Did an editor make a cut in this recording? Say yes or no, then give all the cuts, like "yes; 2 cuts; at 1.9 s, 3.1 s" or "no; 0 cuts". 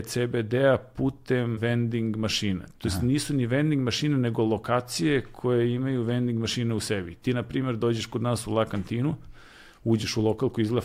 yes; 1 cut; at 1.6 s